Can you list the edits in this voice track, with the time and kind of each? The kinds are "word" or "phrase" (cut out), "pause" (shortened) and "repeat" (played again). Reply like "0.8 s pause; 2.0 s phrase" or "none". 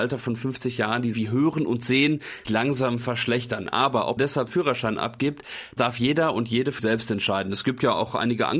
1.1 s word; 2.4 s word; 4.2 s word; 4.5 s word; 5.8 s word; 6.8 s word